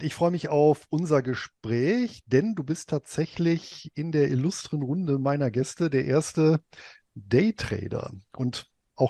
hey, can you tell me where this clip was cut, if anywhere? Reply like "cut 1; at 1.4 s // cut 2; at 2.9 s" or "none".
none